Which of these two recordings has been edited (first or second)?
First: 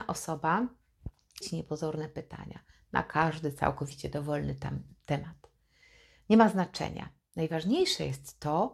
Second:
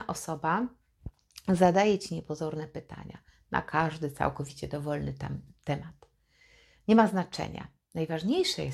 first